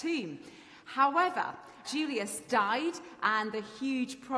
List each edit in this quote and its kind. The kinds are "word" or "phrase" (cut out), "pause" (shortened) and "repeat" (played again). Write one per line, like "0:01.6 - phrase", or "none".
0:01.8 - word